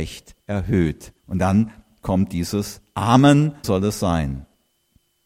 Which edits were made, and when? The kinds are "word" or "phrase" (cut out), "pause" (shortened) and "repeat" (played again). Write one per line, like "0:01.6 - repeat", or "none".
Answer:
0:01.2 - pause
0:03.6 - word